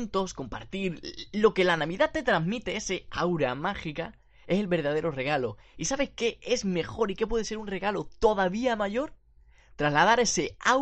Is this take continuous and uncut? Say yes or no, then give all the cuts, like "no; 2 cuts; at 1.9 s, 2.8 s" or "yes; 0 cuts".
yes; 0 cuts